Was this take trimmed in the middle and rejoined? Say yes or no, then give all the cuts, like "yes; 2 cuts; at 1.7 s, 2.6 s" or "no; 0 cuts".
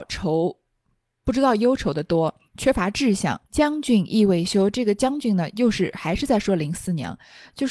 yes; 1 cut; at 3.5 s